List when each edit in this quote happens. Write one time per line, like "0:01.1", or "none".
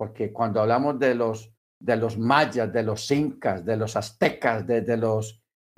0:01.6